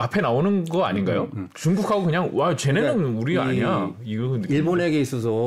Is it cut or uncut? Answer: uncut